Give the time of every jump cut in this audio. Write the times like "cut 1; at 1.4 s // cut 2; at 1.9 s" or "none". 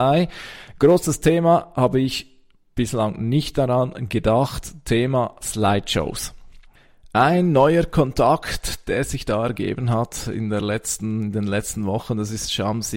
none